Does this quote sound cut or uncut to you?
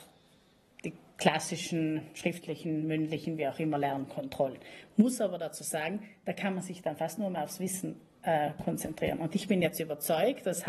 uncut